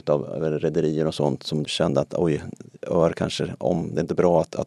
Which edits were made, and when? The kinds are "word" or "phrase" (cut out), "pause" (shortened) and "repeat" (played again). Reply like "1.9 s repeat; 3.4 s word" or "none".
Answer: 1.6 s word